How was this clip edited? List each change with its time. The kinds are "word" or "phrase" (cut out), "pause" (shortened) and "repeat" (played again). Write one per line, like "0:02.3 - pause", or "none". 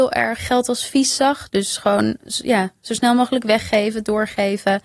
none